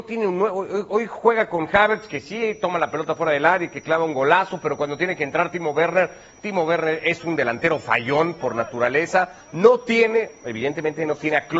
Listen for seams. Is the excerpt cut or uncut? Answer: uncut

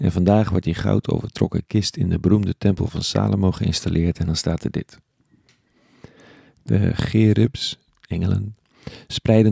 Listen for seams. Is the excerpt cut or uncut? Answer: uncut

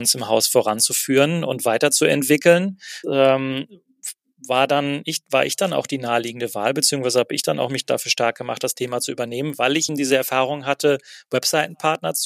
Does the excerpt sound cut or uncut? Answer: cut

